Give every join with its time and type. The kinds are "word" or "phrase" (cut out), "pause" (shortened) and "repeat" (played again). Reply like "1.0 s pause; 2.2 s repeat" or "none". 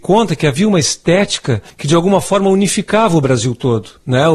1.7 s pause